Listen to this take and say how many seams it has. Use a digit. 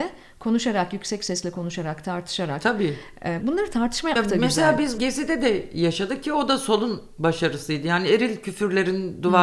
3